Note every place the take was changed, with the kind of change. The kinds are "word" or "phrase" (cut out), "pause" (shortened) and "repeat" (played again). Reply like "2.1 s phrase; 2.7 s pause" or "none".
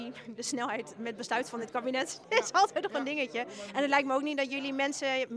none